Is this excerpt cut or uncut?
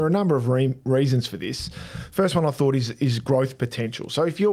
uncut